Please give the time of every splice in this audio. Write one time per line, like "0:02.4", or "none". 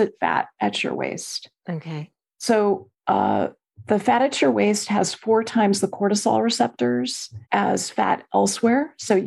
0:07.4